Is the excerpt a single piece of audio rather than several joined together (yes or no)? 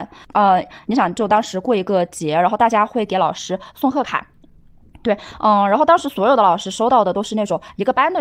yes